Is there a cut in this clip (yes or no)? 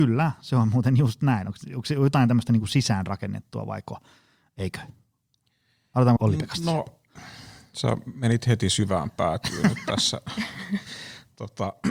yes